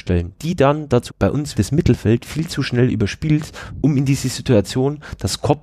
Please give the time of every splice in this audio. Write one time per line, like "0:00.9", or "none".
0:01.1
0:01.5